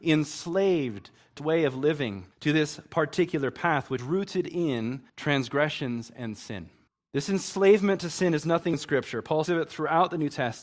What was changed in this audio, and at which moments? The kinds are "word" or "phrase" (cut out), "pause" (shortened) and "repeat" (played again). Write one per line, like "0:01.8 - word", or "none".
0:01.4 - word
0:02.3 - pause
0:04.0 - word
0:05.1 - pause
0:06.9 - pause
0:08.7 - word
0:09.5 - word